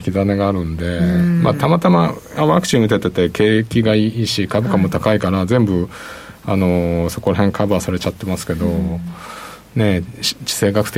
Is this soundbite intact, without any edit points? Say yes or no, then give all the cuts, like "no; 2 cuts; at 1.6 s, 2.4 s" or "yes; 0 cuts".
yes; 0 cuts